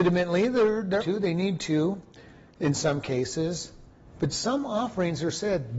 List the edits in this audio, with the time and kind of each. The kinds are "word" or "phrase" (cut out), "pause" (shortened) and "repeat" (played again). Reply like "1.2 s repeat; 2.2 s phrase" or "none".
1.0 s word